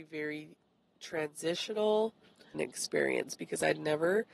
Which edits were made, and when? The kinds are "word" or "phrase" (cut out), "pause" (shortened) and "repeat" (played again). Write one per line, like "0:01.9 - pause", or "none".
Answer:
0:02.5 - word

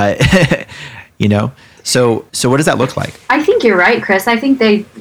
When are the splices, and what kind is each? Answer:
0:02.3 - pause
0:03.2 - pause

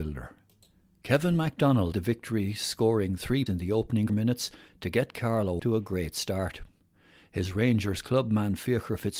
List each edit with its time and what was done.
0:01.9 - word
0:03.5 - word
0:04.1 - word
0:05.6 - word

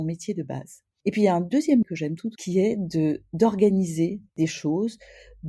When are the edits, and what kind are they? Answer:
0:01.8 - word
0:02.4 - word
0:04.3 - pause

